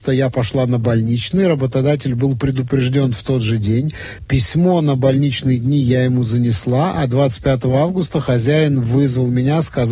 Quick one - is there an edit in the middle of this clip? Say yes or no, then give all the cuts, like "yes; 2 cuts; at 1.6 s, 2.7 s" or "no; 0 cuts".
no; 0 cuts